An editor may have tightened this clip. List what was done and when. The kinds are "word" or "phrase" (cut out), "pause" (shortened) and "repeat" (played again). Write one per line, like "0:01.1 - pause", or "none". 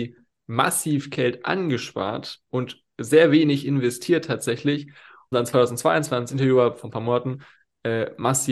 0:05.3 - word
0:06.3 - word